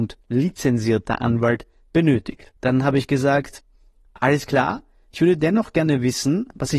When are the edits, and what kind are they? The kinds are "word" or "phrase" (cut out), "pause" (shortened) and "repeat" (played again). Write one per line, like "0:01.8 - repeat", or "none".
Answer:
0:02.6 - pause